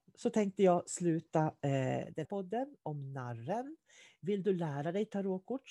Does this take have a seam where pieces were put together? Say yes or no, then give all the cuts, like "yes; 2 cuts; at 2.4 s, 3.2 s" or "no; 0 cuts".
yes; 1 cut; at 2.2 s